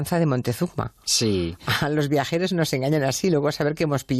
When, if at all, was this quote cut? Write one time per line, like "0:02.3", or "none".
none